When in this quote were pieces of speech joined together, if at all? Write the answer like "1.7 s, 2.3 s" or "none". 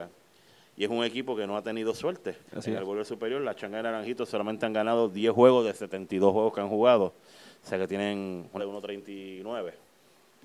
2.5 s, 8.6 s